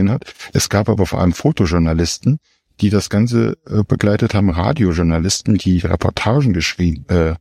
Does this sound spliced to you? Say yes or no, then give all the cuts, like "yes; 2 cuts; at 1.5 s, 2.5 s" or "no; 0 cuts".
no; 0 cuts